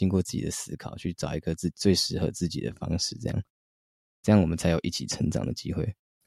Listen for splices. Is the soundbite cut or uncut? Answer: uncut